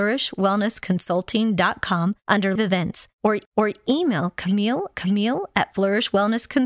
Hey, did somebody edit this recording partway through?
yes; 3 cuts; at 2.6 s, 3.5 s, 4.9 s

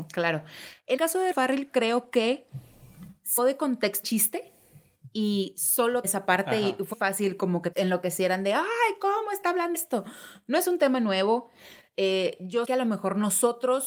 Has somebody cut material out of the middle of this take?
yes; 9 cuts; at 1.0 s, 1.3 s, 3.4 s, 4.0 s, 6.0 s, 6.9 s, 7.7 s, 9.7 s, 12.6 s

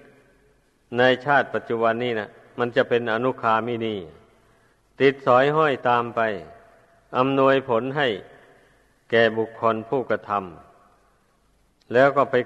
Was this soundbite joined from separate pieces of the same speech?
no; 0 cuts

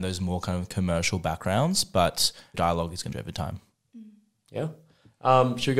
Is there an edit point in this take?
yes; 2 cuts; at 2.5 s, 3.1 s

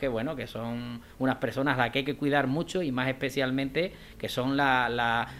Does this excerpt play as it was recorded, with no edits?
yes; 0 cuts

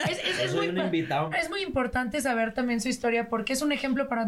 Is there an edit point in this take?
yes; 1 cut; at 1.3 s

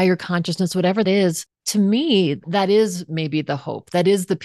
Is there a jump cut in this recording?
yes; 3 cuts; at 1.0 s, 1.5 s, 2.4 s

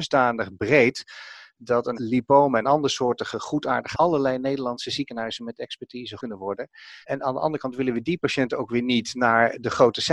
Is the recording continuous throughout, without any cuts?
no; 4 cuts; at 1.9 s, 3.9 s, 6.2 s, 7.0 s

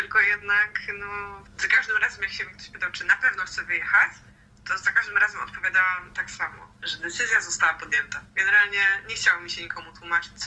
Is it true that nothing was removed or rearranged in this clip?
no; 1 cut; at 8.3 s

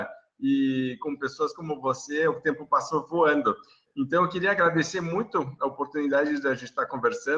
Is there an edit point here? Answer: no; 0 cuts

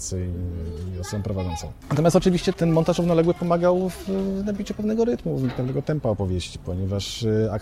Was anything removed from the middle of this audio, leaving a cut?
yes; 1 cut; at 2.5 s

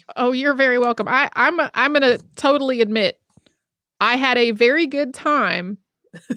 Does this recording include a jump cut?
no; 0 cuts

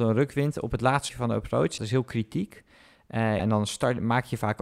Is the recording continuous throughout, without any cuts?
no; 3 cuts; at 1.1 s, 1.8 s, 3.4 s

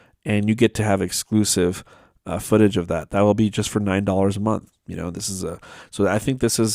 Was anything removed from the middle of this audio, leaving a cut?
no; 0 cuts

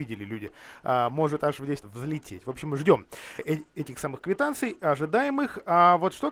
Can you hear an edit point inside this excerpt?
yes; 2 cuts; at 1.8 s, 3.4 s

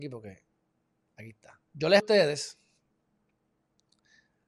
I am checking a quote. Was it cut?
yes; 2 cuts; at 1.6 s, 2.0 s

